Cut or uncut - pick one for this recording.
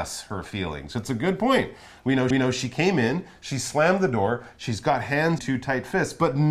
cut